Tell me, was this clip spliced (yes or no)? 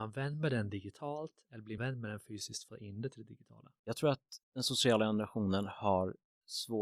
yes